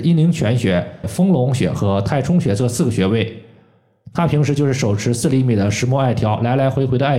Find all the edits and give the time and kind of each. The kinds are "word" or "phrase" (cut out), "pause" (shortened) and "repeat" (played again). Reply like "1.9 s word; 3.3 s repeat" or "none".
1.0 s phrase